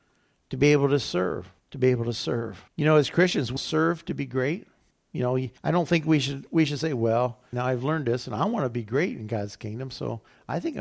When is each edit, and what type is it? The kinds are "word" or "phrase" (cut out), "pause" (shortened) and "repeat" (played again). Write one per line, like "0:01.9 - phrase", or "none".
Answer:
0:01.6 - pause
0:02.7 - pause
0:03.6 - word
0:04.9 - pause
0:05.6 - pause
0:07.5 - word